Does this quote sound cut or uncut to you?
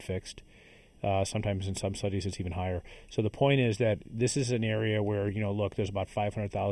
uncut